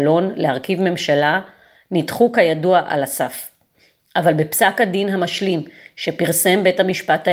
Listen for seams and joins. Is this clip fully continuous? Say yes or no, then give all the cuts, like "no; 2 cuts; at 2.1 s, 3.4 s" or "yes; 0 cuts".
yes; 0 cuts